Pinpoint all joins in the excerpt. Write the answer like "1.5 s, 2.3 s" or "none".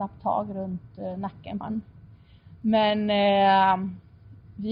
1.6 s